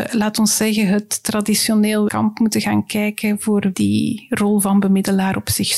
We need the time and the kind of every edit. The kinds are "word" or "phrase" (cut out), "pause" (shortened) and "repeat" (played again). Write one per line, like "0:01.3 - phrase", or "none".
0:02.1 - word
0:03.7 - word